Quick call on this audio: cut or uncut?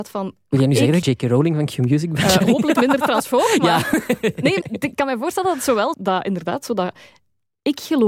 cut